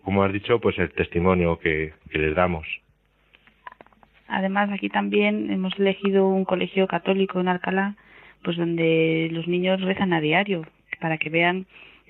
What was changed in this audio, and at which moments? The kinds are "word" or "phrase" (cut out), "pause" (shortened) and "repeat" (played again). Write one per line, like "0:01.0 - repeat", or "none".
none